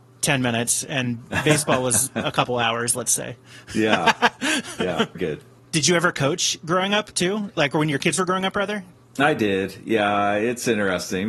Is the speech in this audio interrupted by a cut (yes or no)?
yes